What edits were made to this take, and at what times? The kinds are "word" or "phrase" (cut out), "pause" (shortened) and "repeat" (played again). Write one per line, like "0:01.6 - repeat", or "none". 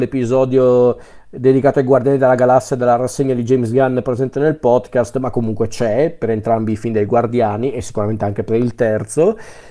none